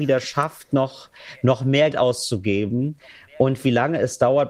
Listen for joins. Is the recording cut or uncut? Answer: cut